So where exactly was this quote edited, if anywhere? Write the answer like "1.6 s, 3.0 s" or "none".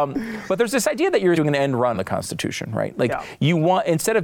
1.3 s, 1.9 s